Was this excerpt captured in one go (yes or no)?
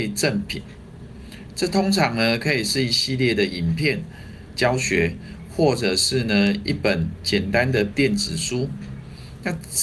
no